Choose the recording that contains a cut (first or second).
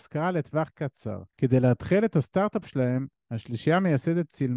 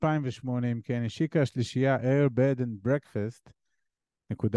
first